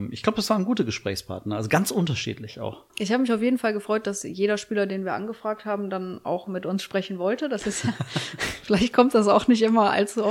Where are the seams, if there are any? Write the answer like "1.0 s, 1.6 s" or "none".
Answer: 2.9 s